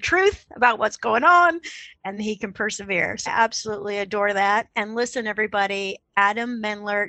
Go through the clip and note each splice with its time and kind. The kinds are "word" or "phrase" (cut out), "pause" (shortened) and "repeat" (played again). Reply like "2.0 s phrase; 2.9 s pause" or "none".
2.2 s word; 3.3 s word